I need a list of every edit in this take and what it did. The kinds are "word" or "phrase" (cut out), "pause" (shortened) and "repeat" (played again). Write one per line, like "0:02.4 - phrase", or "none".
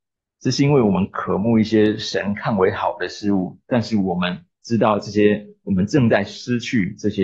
0:04.5 - pause